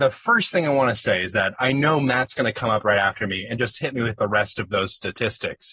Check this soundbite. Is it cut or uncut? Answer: uncut